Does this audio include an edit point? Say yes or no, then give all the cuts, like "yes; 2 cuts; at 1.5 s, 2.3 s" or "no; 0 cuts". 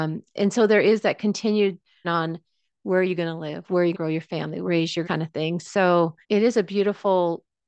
yes; 5 cuts; at 2.0 s, 3.9 s, 4.7 s, 5.0 s, 6.2 s